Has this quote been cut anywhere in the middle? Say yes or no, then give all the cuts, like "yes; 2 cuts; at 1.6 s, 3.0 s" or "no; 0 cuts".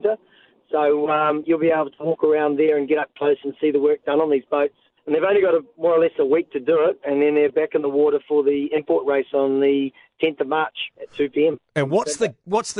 yes; 1 cut; at 5.0 s